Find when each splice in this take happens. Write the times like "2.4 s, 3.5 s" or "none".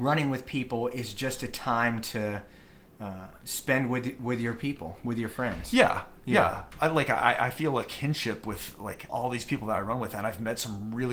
9.1 s

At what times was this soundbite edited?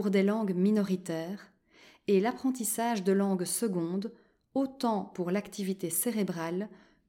none

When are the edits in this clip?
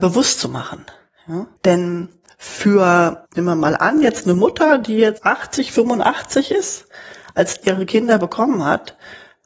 1.6 s, 3.2 s, 5.2 s, 7.6 s

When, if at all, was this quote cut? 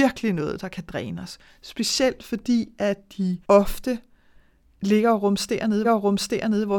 3.4 s, 5.8 s

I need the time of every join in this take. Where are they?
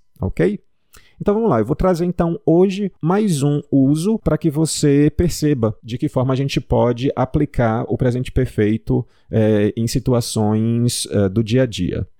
3.0 s

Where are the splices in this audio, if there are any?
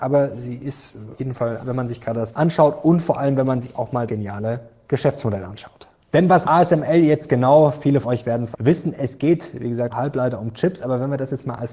1.2 s, 1.6 s, 2.3 s, 4.1 s, 6.4 s, 8.0 s, 8.5 s, 9.9 s

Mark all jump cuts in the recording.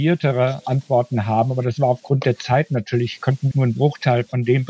3.5 s

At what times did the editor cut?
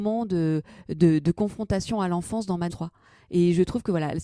2.7 s

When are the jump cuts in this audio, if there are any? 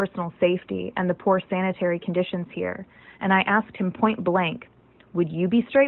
none

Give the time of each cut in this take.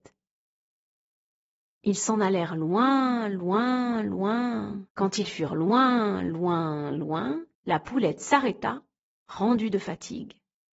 4.9 s, 7.5 s

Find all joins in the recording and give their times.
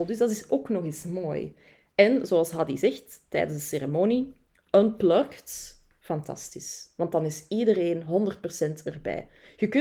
none

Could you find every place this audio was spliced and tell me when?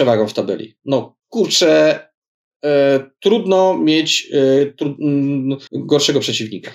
5.7 s

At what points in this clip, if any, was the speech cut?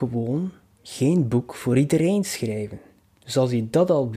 none

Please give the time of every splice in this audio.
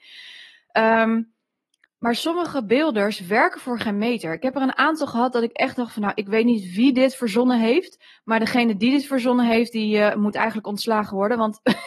none

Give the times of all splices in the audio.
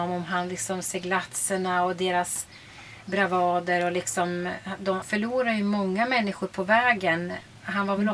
5.0 s

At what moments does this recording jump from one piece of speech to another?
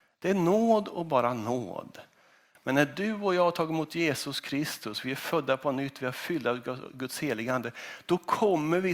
none

